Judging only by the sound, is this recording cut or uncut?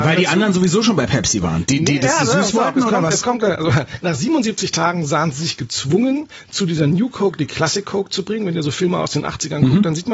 uncut